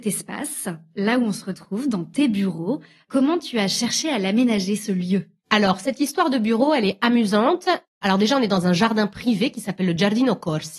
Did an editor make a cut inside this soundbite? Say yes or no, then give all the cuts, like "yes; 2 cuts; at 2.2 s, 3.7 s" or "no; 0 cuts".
no; 0 cuts